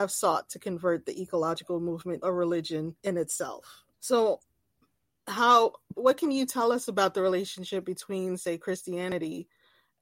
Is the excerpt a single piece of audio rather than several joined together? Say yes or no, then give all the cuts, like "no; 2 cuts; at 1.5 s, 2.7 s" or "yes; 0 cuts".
no; 4 cuts; at 2.2 s, 3.0 s, 3.9 s, 6.0 s